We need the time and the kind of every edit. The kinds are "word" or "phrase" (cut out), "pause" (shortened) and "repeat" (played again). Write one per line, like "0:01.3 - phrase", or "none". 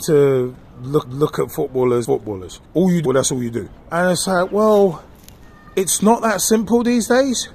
0:01.0 - repeat
0:02.0 - phrase
0:02.6 - pause
0:03.1 - phrase
0:03.8 - pause
0:05.7 - pause